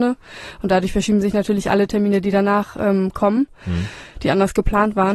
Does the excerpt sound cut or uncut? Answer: uncut